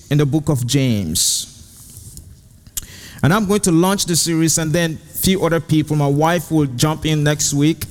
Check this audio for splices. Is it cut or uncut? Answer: uncut